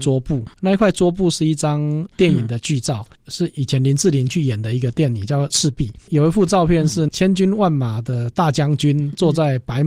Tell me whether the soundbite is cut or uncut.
uncut